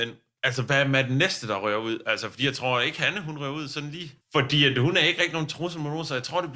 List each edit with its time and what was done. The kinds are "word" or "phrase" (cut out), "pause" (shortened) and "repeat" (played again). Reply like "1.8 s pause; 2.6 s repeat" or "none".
4.2 s pause